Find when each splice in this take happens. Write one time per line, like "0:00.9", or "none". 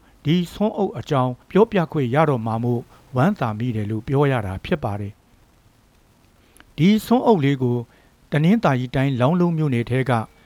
0:01.4